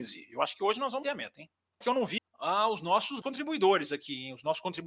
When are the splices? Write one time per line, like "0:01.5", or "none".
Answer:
0:01.0
0:01.8
0:02.2
0:03.2

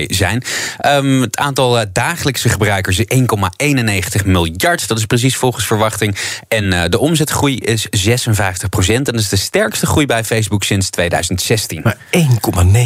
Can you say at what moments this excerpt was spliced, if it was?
none

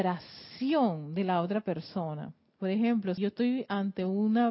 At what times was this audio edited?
0:03.2

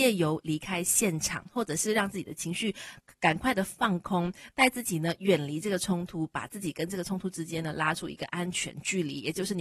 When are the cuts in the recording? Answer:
none

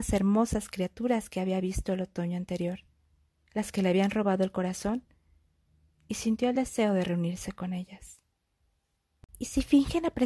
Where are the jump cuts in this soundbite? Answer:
none

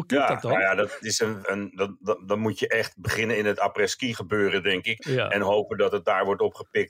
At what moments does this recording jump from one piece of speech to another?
0:01.4

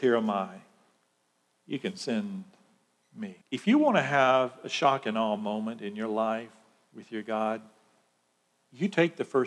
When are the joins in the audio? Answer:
0:03.4

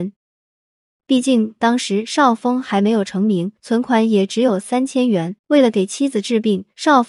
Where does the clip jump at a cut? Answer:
0:03.6
0:05.4

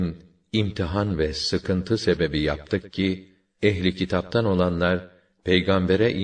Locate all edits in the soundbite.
none

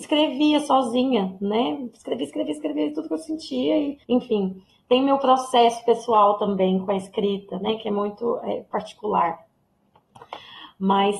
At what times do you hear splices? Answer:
0:04.0

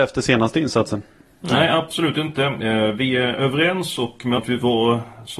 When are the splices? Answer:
0:04.4

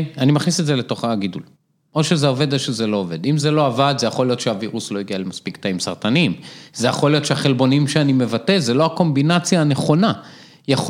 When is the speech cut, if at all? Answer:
0:01.6

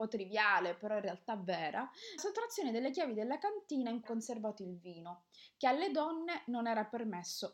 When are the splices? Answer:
0:02.2
0:04.1

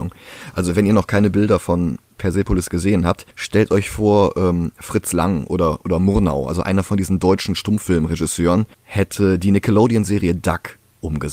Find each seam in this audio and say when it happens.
0:03.3
0:08.7

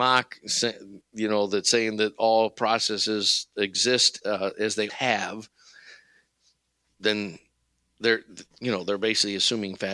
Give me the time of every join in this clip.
0:04.2
0:04.9
0:06.9

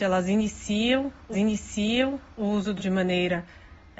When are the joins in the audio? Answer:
0:01.3
0:02.8

